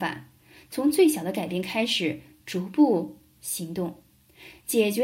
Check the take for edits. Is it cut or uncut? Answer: uncut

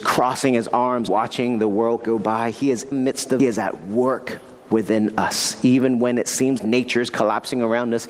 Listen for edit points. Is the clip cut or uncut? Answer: cut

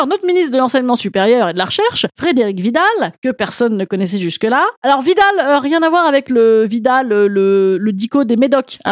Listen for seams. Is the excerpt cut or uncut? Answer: uncut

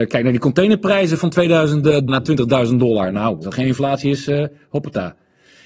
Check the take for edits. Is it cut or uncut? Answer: cut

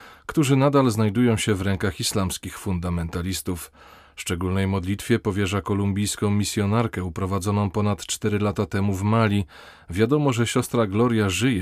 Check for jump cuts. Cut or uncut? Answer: uncut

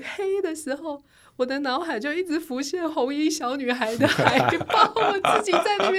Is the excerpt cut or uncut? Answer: uncut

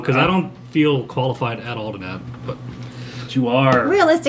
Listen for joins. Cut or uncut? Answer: cut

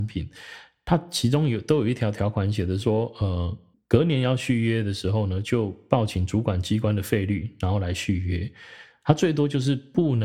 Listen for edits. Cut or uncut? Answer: cut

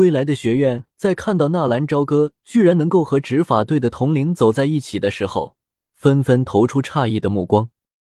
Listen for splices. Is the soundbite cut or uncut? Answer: uncut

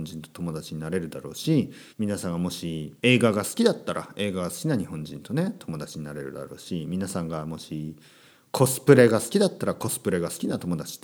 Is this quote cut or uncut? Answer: cut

